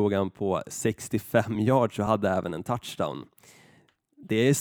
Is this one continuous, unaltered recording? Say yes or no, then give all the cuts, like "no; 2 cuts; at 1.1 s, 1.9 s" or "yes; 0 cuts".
yes; 0 cuts